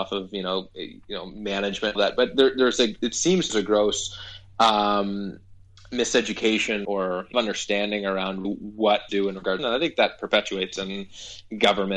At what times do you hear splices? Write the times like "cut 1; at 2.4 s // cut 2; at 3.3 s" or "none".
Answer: cut 1; at 1.9 s // cut 2; at 3.0 s // cut 3; at 3.5 s // cut 4; at 6.8 s // cut 5; at 7.3 s // cut 6; at 8.4 s // cut 7; at 9.1 s // cut 8; at 9.6 s

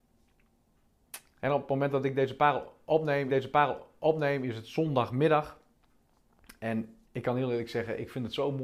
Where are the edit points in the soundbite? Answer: cut 1; at 3.3 s

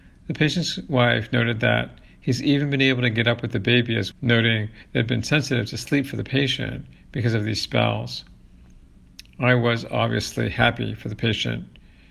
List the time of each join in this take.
cut 1; at 4.1 s

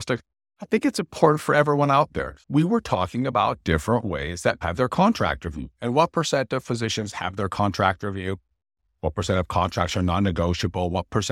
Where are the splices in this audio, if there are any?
cut 1; at 2.4 s // cut 2; at 4.6 s

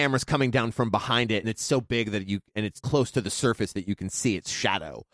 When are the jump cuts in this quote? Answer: cut 1; at 1.4 s // cut 2; at 2.8 s

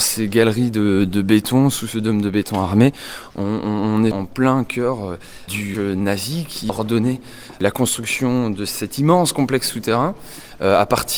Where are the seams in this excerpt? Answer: cut 1; at 4.1 s // cut 2; at 5.7 s // cut 3; at 6.7 s

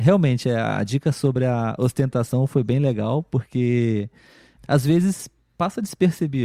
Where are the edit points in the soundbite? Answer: none

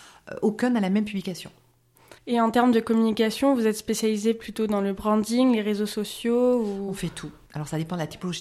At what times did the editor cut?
cut 1; at 2.2 s

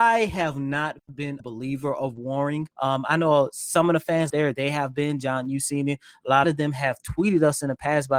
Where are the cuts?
cut 1; at 1.4 s // cut 2; at 2.7 s // cut 3; at 4.3 s // cut 4; at 6.4 s

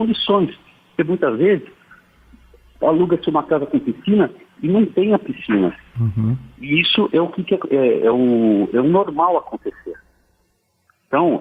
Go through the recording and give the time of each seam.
none

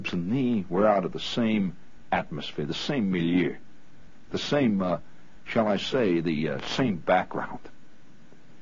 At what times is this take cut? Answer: none

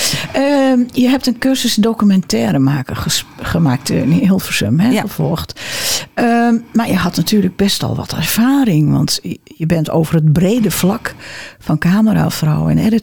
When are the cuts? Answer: none

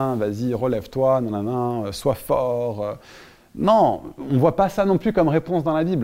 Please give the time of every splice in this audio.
none

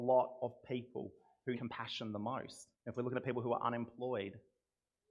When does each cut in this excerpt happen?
cut 1; at 1.5 s // cut 2; at 2.7 s

